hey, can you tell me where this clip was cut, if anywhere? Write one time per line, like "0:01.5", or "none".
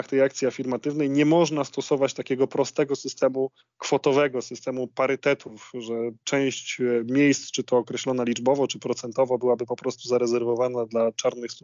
none